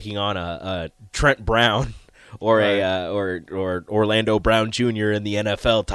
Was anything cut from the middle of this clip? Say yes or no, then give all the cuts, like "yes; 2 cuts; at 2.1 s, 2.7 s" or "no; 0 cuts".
no; 0 cuts